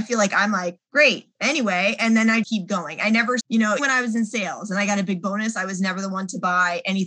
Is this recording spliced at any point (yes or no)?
yes